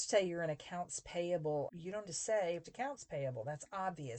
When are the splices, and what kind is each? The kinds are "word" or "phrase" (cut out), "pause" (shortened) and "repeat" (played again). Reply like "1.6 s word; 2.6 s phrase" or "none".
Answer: 1.7 s word; 2.1 s word; 2.6 s word